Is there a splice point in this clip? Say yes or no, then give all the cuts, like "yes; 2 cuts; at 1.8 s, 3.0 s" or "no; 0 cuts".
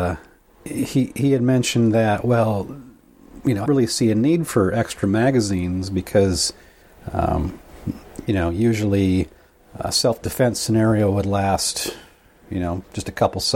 yes; 1 cut; at 3.6 s